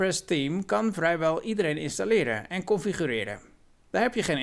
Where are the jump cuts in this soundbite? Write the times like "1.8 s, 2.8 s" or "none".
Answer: none

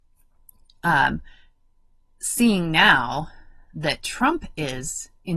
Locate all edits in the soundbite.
none

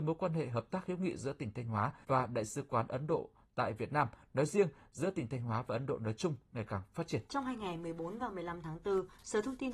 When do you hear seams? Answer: 2.0 s, 7.3 s

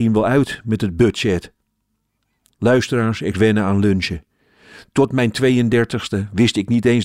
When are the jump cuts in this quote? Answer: 3.3 s

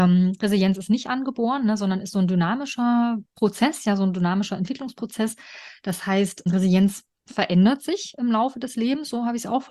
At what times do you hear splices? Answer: 3.3 s

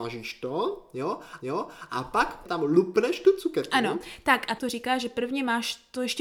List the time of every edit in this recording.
1.4 s, 2.4 s, 4.6 s

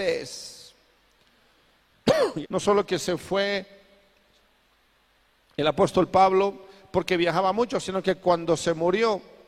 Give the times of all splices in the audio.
2.4 s

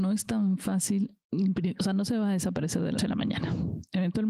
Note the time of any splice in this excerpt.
3.0 s

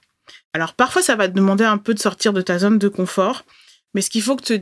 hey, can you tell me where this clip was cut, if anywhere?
none

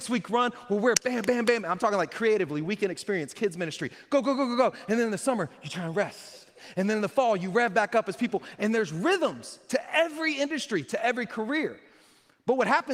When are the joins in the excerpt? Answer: none

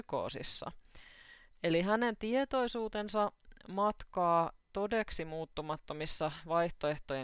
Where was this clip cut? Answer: none

